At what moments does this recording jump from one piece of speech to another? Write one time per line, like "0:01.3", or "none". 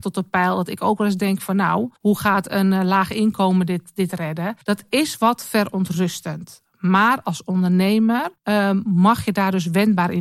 0:02.0
0:04.6
0:08.4